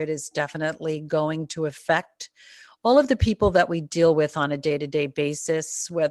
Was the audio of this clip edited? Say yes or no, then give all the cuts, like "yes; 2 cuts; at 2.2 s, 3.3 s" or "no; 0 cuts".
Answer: no; 0 cuts